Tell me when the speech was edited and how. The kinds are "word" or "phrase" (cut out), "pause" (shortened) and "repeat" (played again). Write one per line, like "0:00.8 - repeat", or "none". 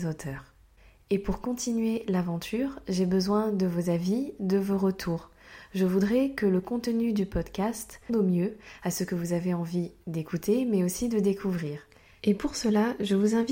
0:08.1 - word